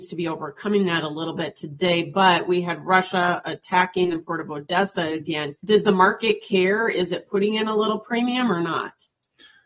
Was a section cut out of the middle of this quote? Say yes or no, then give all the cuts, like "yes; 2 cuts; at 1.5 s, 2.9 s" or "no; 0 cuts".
yes; 1 cut; at 5.6 s